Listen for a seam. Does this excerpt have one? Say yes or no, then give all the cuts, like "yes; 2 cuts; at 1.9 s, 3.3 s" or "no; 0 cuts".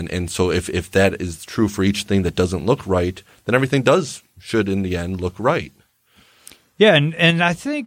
no; 0 cuts